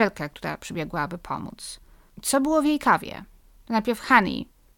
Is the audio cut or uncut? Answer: uncut